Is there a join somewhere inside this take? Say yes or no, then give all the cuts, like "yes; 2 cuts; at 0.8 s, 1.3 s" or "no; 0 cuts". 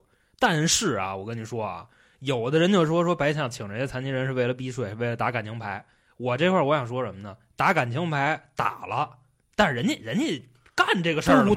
no; 0 cuts